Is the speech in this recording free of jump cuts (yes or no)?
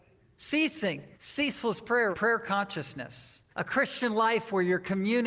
no